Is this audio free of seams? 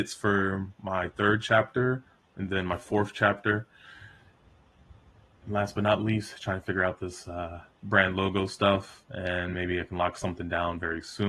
yes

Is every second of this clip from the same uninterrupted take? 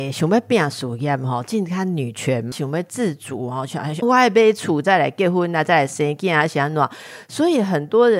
no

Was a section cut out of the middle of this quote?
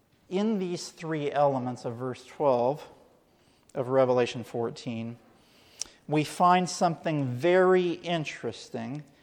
no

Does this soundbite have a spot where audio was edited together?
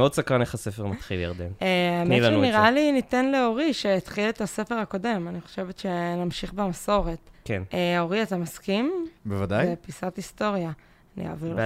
yes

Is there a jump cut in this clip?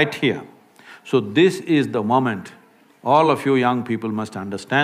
no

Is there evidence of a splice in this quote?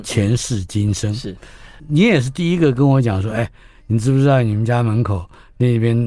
no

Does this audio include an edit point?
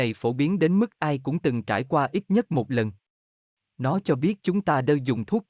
no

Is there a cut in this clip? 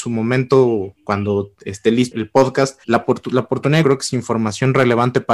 yes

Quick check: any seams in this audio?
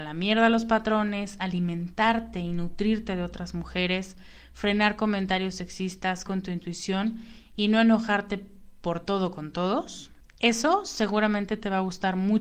yes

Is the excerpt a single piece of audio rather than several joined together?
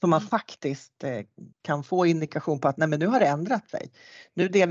no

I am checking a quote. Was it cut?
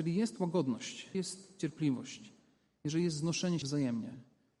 yes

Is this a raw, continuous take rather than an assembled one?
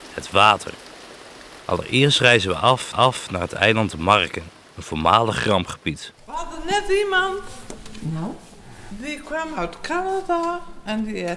no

